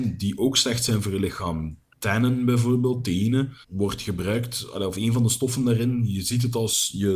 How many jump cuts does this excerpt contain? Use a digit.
1